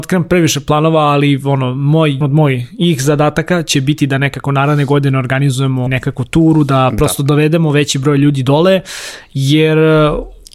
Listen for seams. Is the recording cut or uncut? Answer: cut